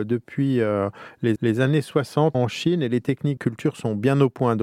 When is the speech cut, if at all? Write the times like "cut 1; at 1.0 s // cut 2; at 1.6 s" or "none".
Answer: cut 1; at 1.4 s // cut 2; at 2.3 s // cut 3; at 3.4 s